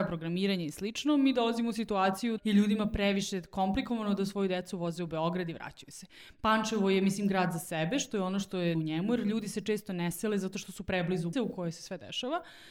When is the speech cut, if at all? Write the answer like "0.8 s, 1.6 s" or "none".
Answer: 2.4 s, 8.7 s, 11.3 s